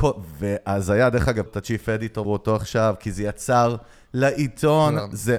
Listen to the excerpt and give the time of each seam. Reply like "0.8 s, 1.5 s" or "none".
1.5 s, 2.2 s